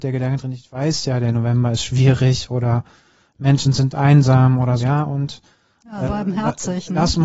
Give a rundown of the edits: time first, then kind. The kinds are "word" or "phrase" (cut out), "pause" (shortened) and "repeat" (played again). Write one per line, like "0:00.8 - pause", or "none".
0:04.8 - word
0:06.0 - word